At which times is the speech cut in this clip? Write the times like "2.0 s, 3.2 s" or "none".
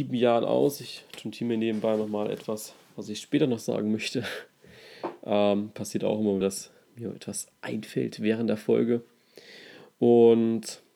6.4 s